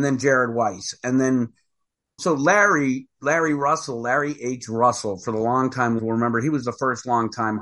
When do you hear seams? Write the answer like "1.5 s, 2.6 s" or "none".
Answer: 2.2 s, 3.1 s, 6.0 s